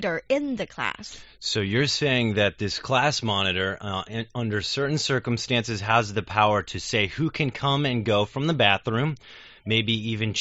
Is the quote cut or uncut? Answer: uncut